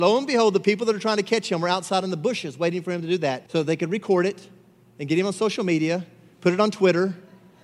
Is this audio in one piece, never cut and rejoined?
no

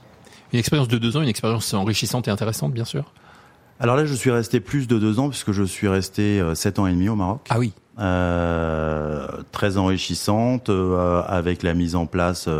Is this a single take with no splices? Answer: yes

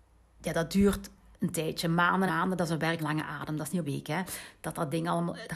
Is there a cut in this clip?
yes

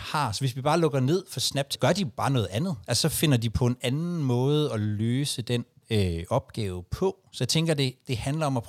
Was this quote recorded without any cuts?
no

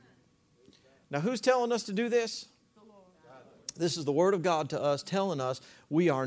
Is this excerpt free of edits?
yes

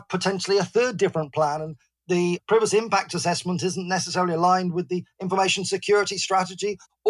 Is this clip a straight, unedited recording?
yes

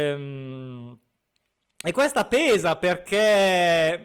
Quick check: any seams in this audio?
no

